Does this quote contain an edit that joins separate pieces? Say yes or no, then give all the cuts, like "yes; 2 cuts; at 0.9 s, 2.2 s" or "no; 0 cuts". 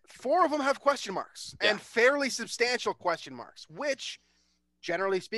no; 0 cuts